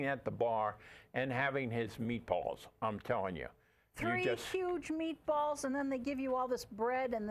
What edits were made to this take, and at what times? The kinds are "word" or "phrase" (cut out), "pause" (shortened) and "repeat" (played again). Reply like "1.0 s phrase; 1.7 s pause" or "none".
none